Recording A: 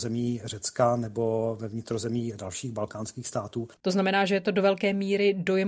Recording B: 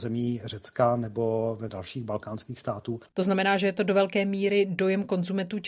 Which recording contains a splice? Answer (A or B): B